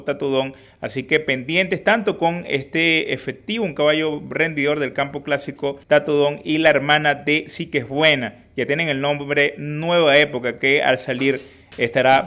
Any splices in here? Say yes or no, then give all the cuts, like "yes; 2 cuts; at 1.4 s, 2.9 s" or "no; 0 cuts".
yes; 1 cut; at 5.8 s